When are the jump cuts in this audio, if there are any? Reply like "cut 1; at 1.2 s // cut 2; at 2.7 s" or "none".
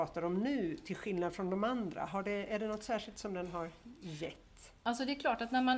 none